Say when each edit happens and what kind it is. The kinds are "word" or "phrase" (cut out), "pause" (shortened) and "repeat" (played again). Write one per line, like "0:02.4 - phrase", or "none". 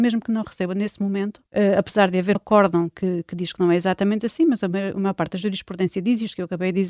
0:01.5 - pause
0:02.3 - word